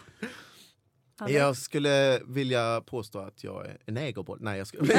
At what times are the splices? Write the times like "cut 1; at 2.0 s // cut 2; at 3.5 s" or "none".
none

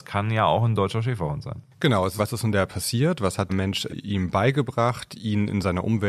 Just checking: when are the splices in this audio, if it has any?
cut 1; at 2.2 s // cut 2; at 2.7 s // cut 3; at 3.5 s // cut 4; at 3.9 s

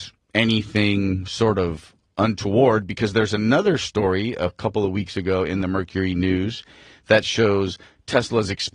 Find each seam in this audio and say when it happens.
none

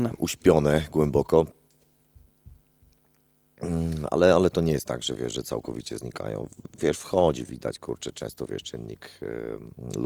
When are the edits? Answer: none

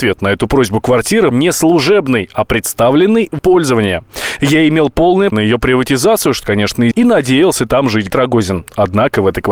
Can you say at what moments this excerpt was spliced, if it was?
cut 1; at 1.3 s // cut 2; at 3.4 s // cut 3; at 5.3 s // cut 4; at 6.4 s // cut 5; at 6.9 s // cut 6; at 8.1 s

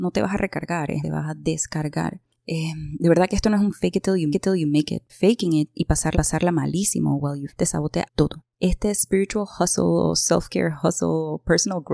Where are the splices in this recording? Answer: cut 1; at 1.0 s // cut 2; at 2.3 s // cut 3; at 4.3 s // cut 4; at 5.1 s // cut 5; at 6.1 s // cut 6; at 7.5 s // cut 7; at 8.1 s // cut 8; at 8.5 s

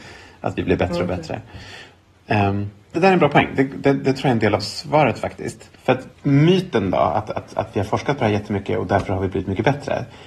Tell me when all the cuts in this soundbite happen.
cut 1; at 2.9 s // cut 2; at 5.7 s // cut 3; at 6.1 s

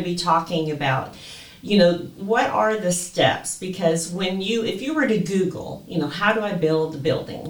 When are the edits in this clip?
cut 1; at 2.2 s

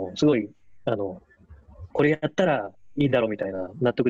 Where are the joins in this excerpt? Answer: cut 1; at 1.9 s

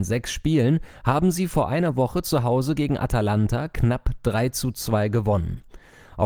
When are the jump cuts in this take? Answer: none

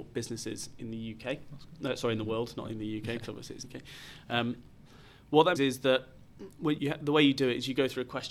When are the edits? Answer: cut 1; at 3.6 s // cut 2; at 5.6 s // cut 3; at 6.8 s

